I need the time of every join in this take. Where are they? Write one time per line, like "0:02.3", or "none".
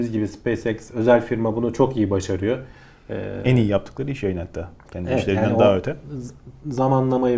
none